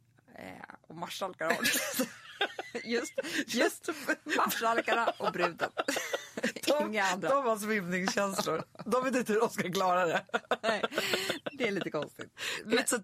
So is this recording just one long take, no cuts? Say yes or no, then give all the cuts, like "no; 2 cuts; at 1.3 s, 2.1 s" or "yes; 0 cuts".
yes; 0 cuts